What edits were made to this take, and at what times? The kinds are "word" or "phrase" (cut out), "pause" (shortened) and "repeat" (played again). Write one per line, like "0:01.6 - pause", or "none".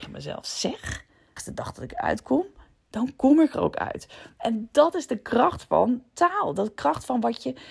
0:01.4 - word